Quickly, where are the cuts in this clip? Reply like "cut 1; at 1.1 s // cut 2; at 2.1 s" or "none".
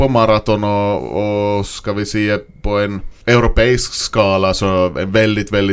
cut 1; at 3.2 s